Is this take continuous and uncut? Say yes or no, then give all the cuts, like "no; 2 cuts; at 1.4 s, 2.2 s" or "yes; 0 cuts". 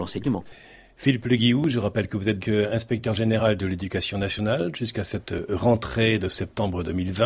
no; 1 cut; at 2.4 s